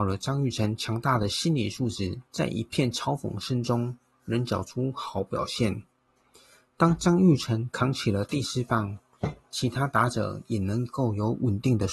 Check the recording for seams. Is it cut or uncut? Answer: cut